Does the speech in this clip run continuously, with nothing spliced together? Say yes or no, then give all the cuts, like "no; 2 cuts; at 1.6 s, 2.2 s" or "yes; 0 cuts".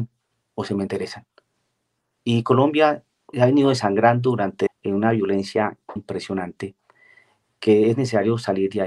no; 3 cuts; at 3.3 s, 4.7 s, 6.0 s